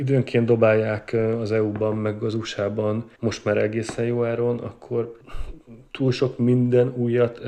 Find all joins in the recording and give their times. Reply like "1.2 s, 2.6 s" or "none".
3.1 s